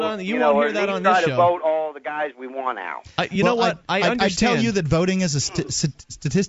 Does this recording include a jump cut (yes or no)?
no